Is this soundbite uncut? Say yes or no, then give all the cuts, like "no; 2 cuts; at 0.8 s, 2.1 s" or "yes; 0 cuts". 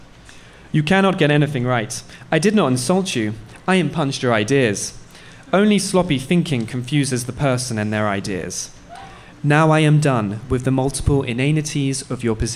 yes; 0 cuts